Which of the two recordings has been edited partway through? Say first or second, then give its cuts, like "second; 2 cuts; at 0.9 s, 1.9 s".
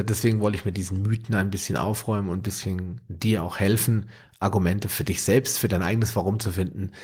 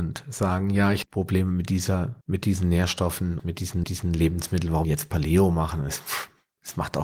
second; 5 cuts; at 1.0 s, 2.2 s, 3.4 s, 3.8 s, 4.8 s